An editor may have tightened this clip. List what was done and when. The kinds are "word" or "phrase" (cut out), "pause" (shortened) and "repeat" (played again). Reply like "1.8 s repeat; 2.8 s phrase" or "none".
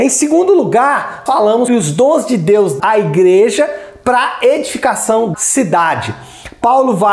1.3 s word; 1.7 s word; 2.8 s word; 5.3 s word